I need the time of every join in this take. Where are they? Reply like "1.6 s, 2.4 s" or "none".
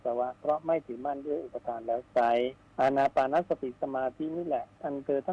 2.6 s